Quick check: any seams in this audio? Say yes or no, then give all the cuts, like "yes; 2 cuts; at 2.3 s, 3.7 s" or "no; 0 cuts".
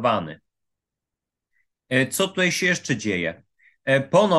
no; 0 cuts